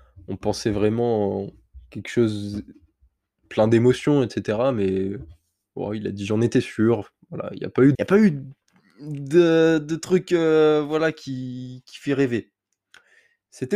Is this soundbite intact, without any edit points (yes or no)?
no